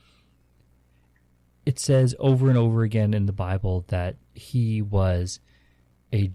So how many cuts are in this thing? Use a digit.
0